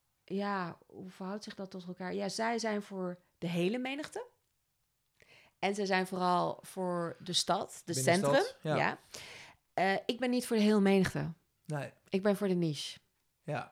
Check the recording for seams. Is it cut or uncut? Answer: uncut